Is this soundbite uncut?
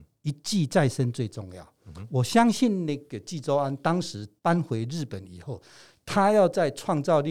no; 1 cut; at 4.4 s

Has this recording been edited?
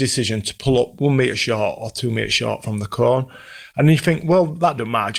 no; 0 cuts

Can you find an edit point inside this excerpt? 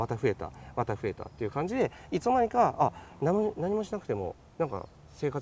yes; 1 cut; at 4.4 s

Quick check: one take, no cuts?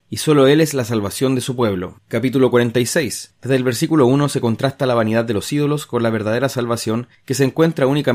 yes; 0 cuts

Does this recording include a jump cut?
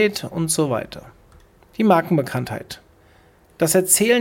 no; 0 cuts

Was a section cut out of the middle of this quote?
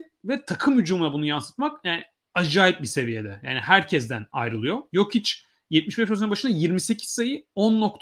no; 0 cuts

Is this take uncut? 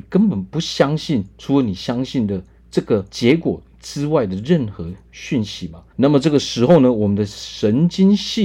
no; 2 cuts; at 3.1 s, 5.9 s

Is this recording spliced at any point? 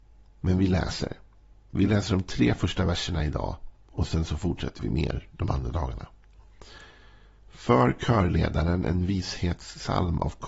no; 0 cuts

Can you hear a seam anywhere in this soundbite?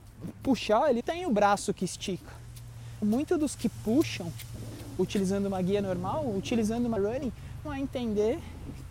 yes; 5 cuts; at 1.0 s, 3.0 s, 3.5 s, 7.0 s, 7.6 s

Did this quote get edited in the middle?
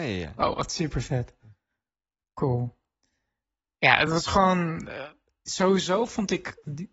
no; 0 cuts

